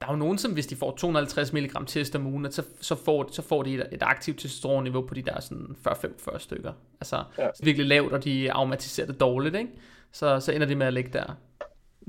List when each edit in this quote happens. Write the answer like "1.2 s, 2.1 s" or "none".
7.6 s